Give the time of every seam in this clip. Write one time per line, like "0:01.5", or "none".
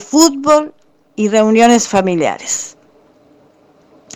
none